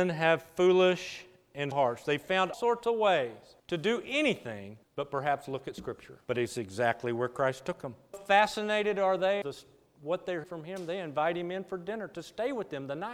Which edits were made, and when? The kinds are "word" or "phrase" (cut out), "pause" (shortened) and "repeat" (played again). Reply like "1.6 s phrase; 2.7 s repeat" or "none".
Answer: 1.7 s word; 2.5 s word; 3.6 s pause; 4.8 s pause; 6.2 s pause; 8.1 s word; 9.4 s word; 10.4 s word